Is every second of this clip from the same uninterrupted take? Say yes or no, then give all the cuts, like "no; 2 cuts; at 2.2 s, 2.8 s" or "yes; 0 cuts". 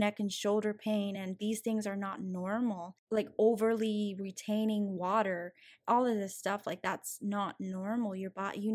yes; 0 cuts